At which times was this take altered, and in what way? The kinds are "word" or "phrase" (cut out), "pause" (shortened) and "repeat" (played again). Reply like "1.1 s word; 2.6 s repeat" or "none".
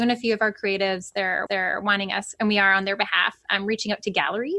1.5 s repeat